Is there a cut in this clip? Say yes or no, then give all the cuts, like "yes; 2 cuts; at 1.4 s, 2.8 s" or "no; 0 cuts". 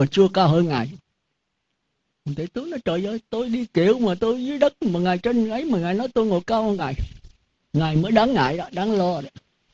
no; 0 cuts